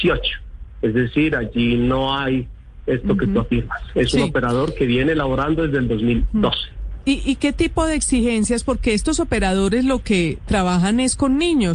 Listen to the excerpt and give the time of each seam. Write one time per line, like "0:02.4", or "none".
none